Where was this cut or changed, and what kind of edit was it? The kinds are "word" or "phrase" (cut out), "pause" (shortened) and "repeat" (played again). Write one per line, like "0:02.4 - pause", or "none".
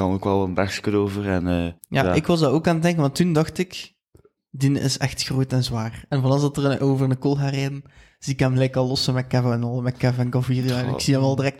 0:01.8 - pause